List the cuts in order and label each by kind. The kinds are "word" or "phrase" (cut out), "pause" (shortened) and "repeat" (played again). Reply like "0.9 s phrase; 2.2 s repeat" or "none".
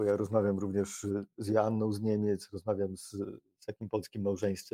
none